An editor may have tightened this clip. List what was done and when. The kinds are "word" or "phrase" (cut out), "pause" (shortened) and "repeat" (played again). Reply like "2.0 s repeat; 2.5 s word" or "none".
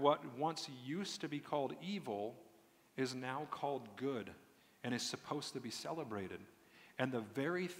none